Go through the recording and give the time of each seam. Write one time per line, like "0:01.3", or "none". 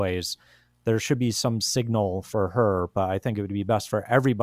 none